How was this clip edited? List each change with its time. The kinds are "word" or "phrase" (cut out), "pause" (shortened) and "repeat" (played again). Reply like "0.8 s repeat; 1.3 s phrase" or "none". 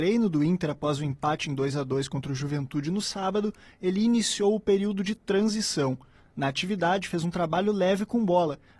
none